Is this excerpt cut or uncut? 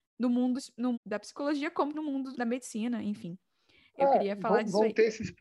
cut